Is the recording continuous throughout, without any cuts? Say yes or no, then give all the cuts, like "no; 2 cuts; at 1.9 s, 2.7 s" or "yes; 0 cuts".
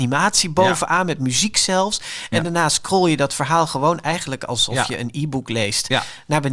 yes; 0 cuts